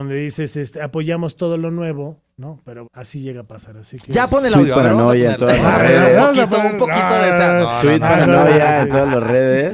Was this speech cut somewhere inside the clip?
yes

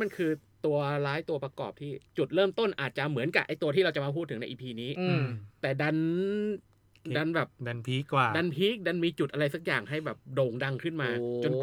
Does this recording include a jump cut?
yes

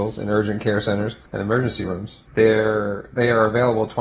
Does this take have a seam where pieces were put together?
yes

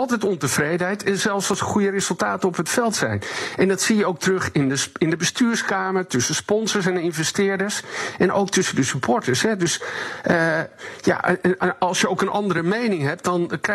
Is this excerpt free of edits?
yes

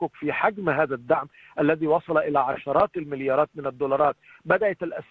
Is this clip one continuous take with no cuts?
yes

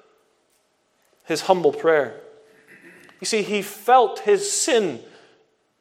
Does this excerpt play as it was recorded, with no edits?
yes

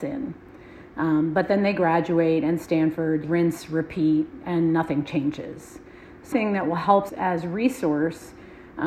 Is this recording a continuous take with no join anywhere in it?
no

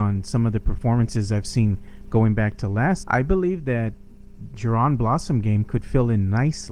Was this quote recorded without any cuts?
no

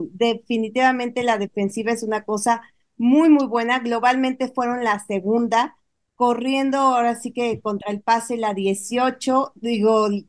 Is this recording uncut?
yes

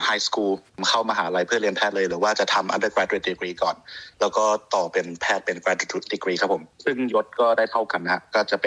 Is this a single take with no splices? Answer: no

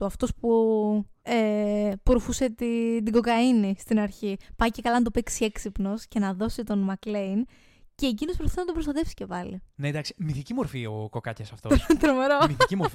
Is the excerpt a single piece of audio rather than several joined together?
no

